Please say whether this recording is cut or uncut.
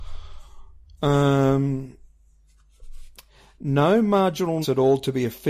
cut